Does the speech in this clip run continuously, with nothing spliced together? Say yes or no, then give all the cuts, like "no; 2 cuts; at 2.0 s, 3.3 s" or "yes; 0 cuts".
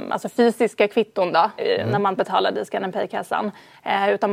no; 2 cuts; at 1.6 s, 2.2 s